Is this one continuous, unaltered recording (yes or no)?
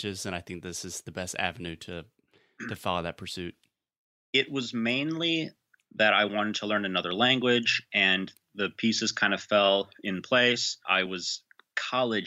yes